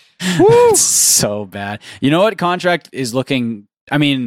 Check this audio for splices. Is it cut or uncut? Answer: uncut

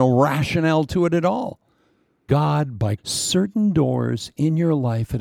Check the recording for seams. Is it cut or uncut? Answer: cut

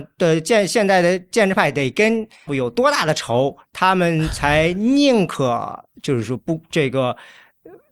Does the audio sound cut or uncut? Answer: cut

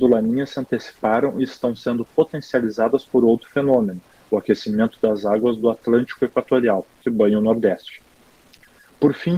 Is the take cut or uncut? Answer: uncut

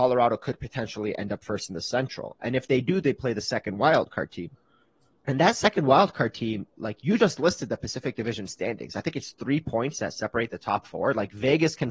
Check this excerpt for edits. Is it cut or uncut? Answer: uncut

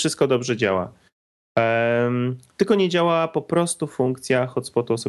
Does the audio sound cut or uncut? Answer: uncut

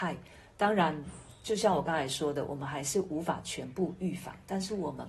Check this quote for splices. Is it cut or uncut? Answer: uncut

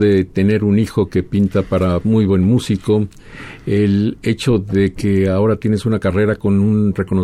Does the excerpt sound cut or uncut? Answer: uncut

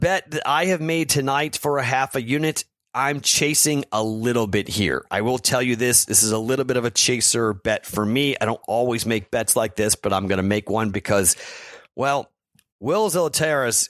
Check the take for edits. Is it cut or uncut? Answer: uncut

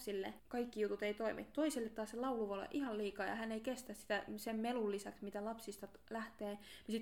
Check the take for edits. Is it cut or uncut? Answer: uncut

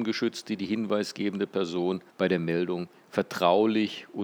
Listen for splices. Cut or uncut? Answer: cut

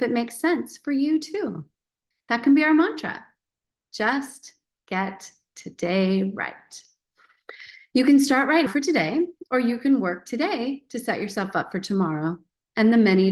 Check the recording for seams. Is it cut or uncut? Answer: cut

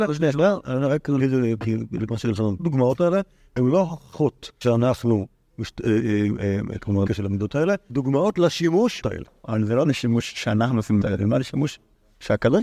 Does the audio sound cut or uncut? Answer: cut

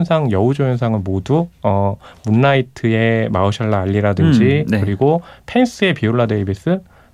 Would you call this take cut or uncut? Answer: uncut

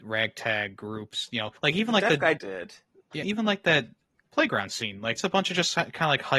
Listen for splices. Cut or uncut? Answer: cut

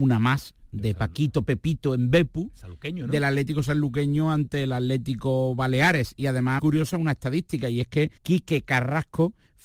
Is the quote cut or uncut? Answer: cut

